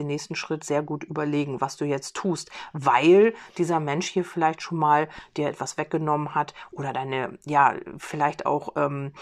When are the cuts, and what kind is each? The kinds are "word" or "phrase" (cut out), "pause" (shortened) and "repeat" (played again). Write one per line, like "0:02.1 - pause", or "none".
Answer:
none